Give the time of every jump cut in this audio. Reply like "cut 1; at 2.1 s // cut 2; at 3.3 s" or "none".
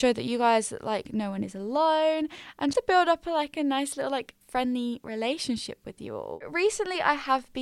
cut 1; at 2.7 s // cut 2; at 4.4 s